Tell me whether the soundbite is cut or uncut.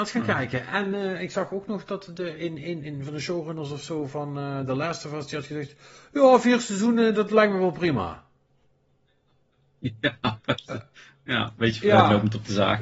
uncut